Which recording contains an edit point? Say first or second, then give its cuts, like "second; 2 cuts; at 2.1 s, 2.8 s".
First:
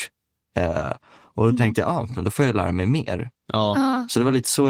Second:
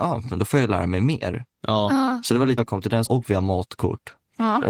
second; 2 cuts; at 2.6 s, 3.1 s